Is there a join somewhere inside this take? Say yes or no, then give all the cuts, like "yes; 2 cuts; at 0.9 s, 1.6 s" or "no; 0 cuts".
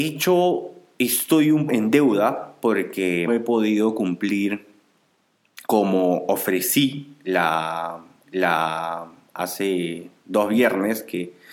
yes; 4 cuts; at 1.7 s, 3.3 s, 5.6 s, 8.2 s